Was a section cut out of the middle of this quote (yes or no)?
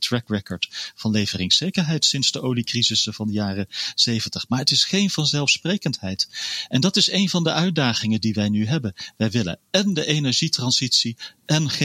no